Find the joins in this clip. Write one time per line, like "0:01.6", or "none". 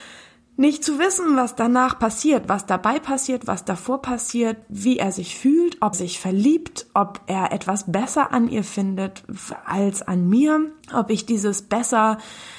0:05.9
0:10.8